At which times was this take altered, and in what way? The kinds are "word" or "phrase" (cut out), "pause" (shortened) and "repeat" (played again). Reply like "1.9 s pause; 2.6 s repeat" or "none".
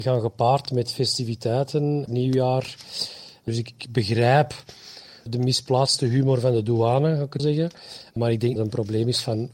2.1 s word; 7.4 s word; 8.6 s word